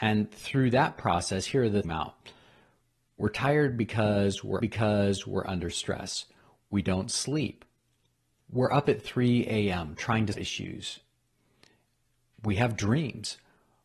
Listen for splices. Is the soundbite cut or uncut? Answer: cut